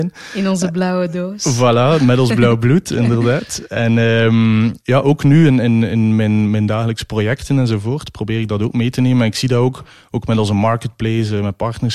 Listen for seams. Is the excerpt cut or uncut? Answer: uncut